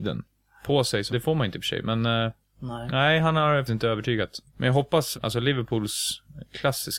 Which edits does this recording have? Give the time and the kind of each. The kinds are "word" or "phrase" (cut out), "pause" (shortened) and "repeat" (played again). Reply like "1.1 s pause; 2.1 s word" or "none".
1.1 s word; 1.6 s phrase; 3.7 s word; 4.5 s pause; 5.1 s word